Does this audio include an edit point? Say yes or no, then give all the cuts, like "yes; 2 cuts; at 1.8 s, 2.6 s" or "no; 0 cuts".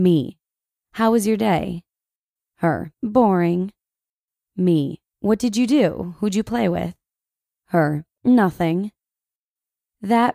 yes; 3 cuts; at 2.9 s, 5.1 s, 8.1 s